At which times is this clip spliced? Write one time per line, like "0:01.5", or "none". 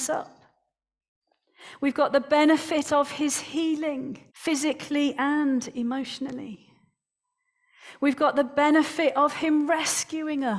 0:04.3